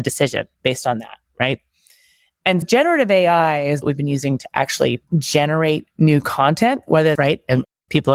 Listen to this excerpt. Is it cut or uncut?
cut